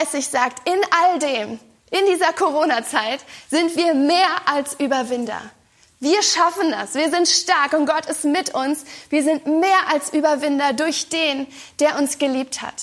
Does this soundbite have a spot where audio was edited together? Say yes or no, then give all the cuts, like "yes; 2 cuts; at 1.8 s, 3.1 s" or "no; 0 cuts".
no; 0 cuts